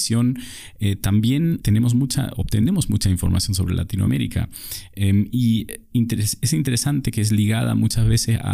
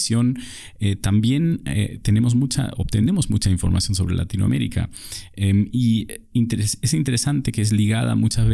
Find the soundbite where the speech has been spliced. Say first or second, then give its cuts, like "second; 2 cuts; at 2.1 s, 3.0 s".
first; 1 cut; at 1.6 s